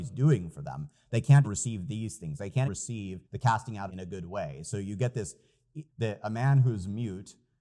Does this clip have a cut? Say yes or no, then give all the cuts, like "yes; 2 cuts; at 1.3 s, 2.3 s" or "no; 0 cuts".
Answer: yes; 5 cuts; at 1.4 s, 2.7 s, 3.2 s, 3.9 s, 5.9 s